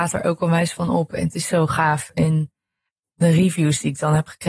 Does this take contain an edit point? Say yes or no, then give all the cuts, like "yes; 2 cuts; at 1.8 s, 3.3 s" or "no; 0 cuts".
yes; 1 cut; at 3.0 s